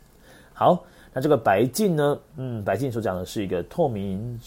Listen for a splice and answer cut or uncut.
uncut